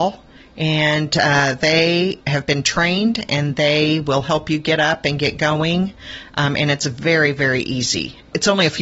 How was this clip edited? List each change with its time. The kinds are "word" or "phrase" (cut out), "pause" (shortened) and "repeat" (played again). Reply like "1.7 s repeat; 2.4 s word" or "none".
2.2 s pause